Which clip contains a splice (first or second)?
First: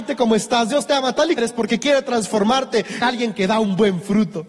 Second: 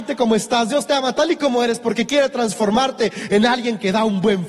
first